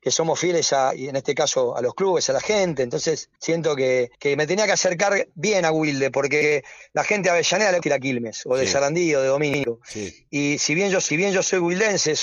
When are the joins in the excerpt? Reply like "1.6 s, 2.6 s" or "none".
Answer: 0.9 s, 3.4 s, 4.1 s, 7.8 s, 10.3 s, 11.1 s